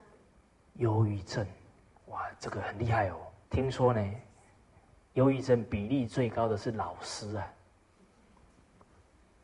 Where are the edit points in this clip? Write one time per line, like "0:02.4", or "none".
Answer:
0:03.4